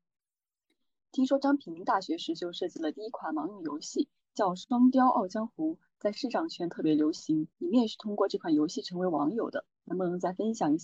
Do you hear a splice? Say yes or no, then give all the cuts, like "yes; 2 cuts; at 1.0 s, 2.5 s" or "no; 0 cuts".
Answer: yes; 2 cuts; at 7.5 s, 9.7 s